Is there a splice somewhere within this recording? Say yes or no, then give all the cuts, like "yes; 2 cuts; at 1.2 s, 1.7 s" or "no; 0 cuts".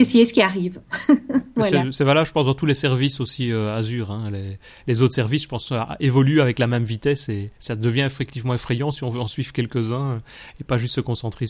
no; 0 cuts